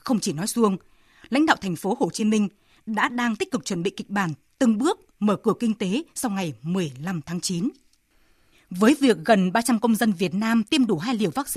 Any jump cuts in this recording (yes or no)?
no